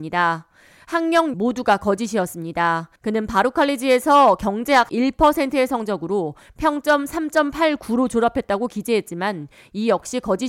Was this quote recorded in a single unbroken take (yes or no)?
no